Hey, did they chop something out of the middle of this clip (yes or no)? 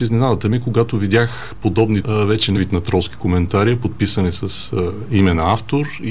yes